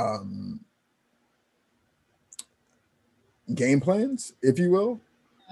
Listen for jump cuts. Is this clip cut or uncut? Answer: uncut